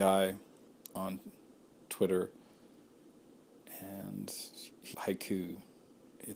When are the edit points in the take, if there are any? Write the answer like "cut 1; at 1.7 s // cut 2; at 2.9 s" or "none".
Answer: cut 1; at 4.9 s